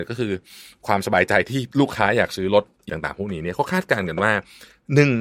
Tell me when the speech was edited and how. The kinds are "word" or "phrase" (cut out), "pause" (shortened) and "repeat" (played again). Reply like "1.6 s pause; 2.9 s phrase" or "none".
1.7 s pause; 2.9 s word